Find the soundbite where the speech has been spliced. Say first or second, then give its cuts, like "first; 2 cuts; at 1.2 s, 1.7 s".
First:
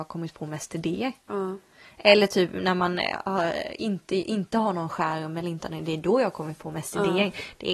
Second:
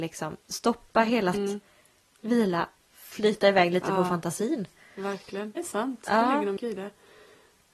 second; 4 cuts; at 1.3 s, 2.8 s, 5.6 s, 6.6 s